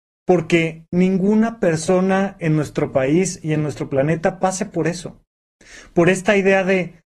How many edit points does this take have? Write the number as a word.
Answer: zero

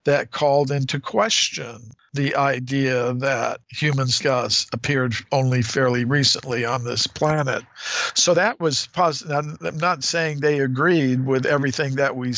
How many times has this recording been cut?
one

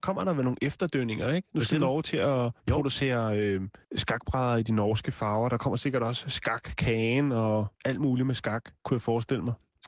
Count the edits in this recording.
four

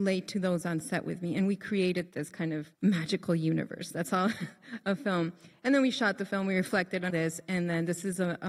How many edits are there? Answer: two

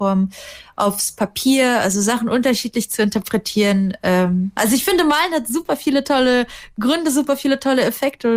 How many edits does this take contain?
one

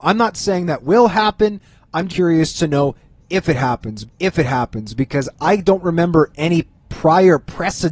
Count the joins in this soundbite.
two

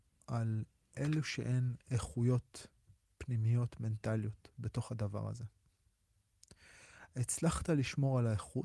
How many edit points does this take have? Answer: zero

